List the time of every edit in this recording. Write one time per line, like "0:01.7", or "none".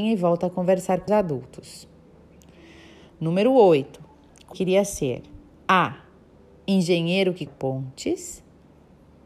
0:01.1
0:04.5
0:07.5